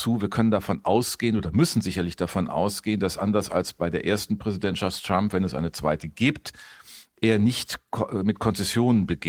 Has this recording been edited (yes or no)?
no